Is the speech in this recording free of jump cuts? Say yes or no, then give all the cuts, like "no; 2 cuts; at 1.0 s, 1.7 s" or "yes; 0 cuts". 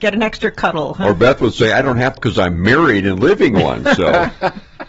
no; 1 cut; at 2.2 s